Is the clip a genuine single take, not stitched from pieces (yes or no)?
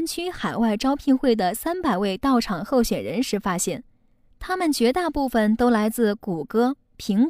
yes